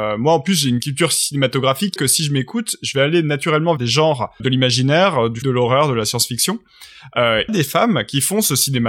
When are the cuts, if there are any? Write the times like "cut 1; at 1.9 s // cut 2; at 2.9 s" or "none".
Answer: cut 1; at 2.0 s // cut 2; at 3.8 s // cut 3; at 4.4 s // cut 4; at 5.4 s // cut 5; at 7.5 s